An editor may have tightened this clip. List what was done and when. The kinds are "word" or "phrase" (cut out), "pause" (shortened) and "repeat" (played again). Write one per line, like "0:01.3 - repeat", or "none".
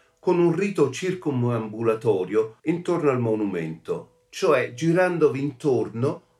0:02.6 - pause